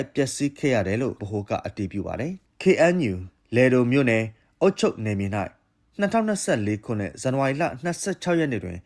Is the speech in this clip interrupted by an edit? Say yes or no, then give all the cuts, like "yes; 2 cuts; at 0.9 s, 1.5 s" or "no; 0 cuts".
yes; 1 cut; at 1.2 s